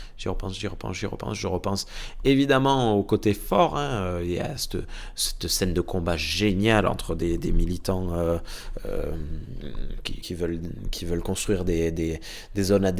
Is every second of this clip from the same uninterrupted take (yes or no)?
no